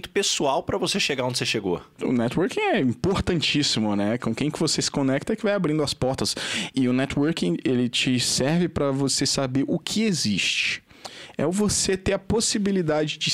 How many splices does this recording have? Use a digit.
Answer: 0